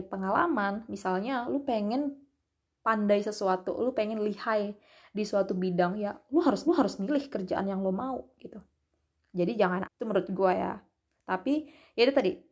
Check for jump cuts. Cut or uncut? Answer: cut